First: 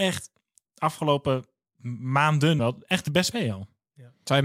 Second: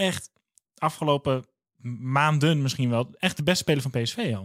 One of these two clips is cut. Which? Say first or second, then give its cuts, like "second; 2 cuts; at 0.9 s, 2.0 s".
first; 2 cuts; at 2.6 s, 3.3 s